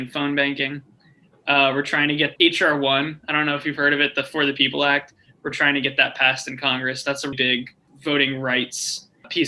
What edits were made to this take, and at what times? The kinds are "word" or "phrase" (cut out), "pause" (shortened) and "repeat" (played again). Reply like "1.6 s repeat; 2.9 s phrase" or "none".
2.4 s word; 7.3 s word